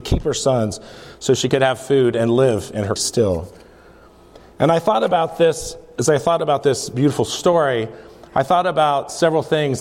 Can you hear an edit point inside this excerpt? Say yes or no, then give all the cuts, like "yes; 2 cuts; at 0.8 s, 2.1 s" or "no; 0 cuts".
yes; 1 cut; at 3.0 s